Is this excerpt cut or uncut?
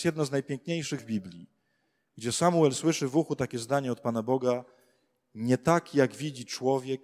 cut